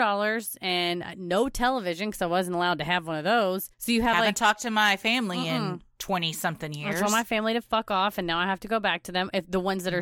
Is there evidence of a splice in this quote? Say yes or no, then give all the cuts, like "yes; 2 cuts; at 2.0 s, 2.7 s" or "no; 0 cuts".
yes; 1 cut; at 3.7 s